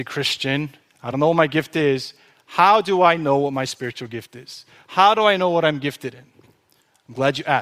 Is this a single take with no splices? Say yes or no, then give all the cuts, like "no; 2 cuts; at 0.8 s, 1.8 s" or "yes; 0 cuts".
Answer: yes; 0 cuts